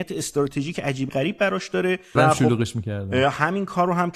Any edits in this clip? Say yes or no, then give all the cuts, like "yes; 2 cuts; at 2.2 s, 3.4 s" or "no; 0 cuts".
yes; 1 cut; at 2.2 s